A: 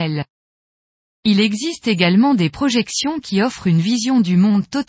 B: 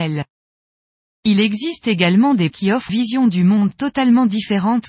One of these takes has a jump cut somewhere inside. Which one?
B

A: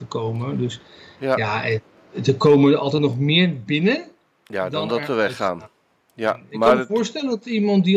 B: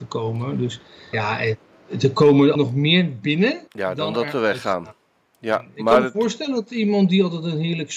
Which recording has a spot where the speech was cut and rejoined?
B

